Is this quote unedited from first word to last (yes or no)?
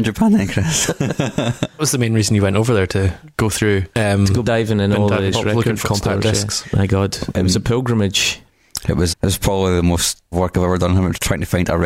no